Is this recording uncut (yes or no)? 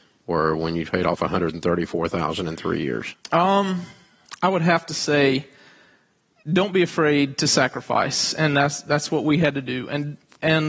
yes